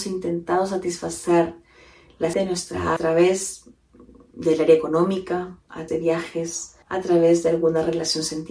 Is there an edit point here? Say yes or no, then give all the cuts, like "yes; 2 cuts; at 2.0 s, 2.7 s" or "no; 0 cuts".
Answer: yes; 4 cuts; at 2.3 s, 3.0 s, 5.9 s, 6.8 s